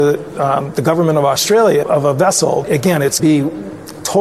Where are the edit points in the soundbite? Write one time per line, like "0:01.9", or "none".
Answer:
0:01.8
0:02.6
0:03.2